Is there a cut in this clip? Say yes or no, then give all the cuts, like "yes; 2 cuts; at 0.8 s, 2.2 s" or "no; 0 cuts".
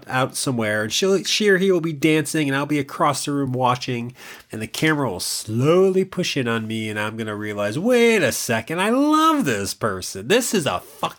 no; 0 cuts